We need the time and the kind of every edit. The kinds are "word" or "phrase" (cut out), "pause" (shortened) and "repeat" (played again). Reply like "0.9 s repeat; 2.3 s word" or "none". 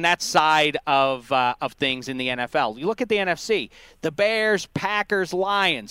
none